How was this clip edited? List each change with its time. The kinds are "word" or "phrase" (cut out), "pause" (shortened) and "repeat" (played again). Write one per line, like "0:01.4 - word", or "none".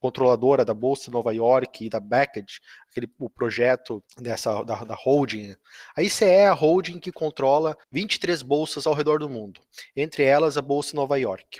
0:04.1 - pause
0:07.8 - pause